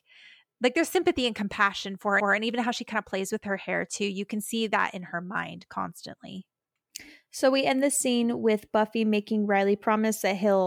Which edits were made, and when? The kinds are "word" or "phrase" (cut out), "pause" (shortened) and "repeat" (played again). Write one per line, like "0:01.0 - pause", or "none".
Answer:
0:02.2 - repeat